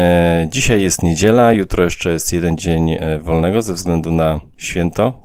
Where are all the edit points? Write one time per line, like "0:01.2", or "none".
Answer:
none